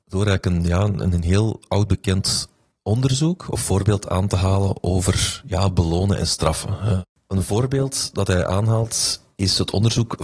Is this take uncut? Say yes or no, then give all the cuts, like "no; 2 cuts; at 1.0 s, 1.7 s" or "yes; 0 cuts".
yes; 0 cuts